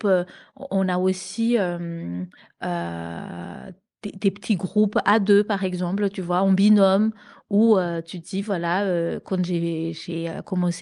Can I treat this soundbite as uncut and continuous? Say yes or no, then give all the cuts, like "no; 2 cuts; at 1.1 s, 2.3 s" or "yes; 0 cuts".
yes; 0 cuts